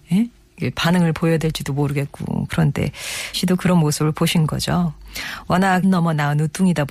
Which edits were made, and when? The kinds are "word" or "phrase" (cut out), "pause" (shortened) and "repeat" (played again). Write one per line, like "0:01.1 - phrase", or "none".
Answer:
0:03.3 - word
0:05.8 - phrase